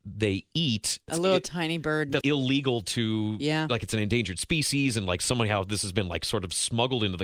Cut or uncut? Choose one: cut